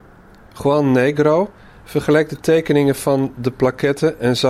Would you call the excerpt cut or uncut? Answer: uncut